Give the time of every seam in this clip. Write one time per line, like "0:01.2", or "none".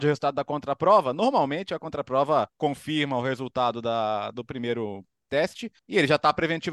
0:02.5
0:05.8

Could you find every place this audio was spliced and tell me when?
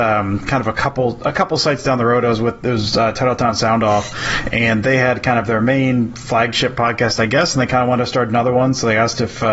none

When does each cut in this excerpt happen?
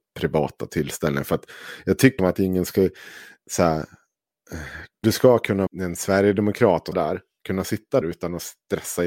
0:02.2
0:05.0
0:05.7
0:06.9
0:08.0

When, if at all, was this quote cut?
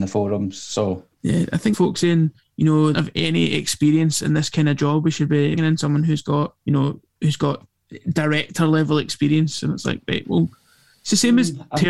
0:01.1
0:01.7
0:02.4
0:02.9
0:05.6
0:06.6

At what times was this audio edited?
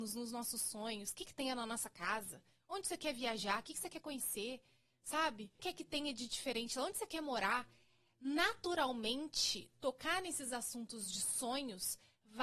0:01.2
0:05.6

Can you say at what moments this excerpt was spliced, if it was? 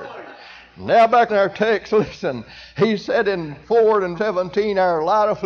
0:01.3
0:03.6
0:04.2

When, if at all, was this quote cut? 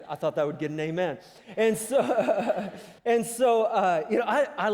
0:03.0

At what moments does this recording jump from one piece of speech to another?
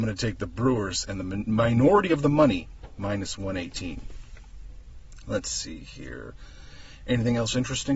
none

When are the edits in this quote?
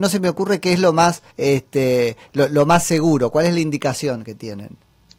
0:01.3

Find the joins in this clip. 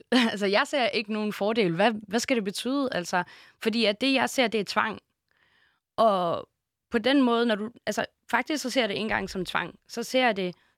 none

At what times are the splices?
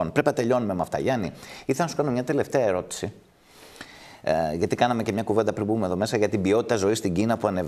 none

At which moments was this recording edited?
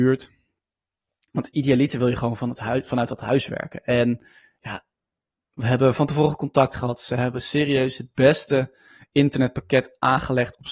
none

